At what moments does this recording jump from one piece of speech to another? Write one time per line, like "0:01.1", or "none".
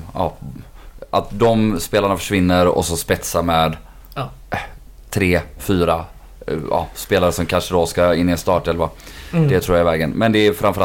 none